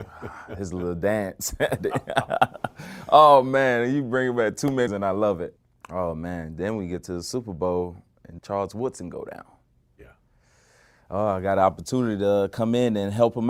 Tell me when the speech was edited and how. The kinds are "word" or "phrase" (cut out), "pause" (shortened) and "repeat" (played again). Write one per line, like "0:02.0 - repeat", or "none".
0:04.9 - word
0:08.4 - word